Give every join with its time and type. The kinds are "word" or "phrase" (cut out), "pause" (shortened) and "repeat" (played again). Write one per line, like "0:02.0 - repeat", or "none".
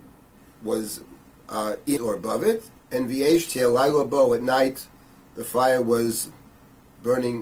0:02.0 - word
0:02.8 - pause